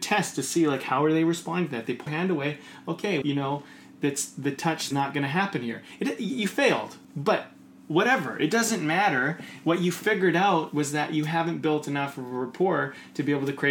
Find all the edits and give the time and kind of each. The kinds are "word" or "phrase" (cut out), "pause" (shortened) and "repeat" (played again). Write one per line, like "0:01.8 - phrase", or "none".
0:02.1 - word
0:03.2 - word
0:04.9 - phrase
0:07.0 - pause